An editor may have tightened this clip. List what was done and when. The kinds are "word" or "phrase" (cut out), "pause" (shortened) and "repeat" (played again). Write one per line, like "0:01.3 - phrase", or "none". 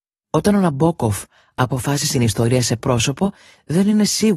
0:02.1 - phrase
0:02.8 - word